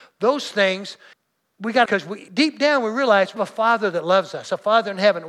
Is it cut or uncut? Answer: cut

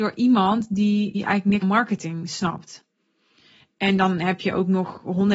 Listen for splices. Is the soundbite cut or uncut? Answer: cut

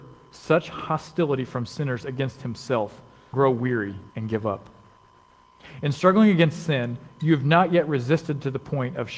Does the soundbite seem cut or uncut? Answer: cut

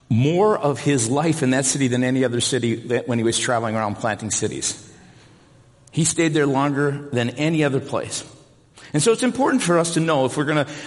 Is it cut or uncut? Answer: uncut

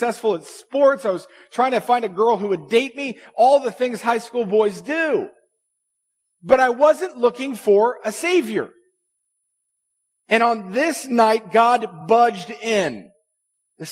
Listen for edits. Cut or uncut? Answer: uncut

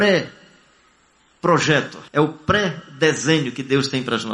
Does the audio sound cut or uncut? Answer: cut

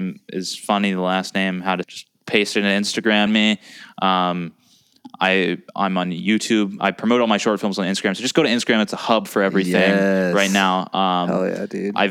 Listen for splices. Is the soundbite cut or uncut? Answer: cut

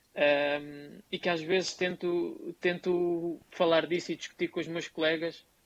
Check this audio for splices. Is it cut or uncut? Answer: cut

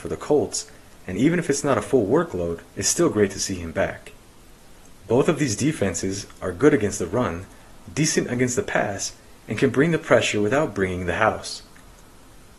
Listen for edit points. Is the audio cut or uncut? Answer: cut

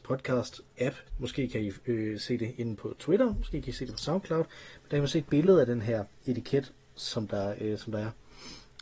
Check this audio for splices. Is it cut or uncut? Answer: cut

